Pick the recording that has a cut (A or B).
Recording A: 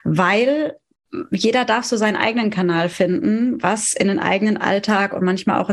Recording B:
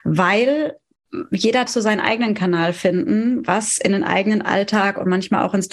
B